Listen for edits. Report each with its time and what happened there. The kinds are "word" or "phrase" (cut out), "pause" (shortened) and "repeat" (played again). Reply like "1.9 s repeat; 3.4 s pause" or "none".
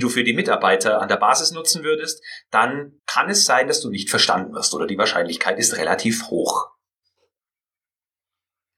3.0 s pause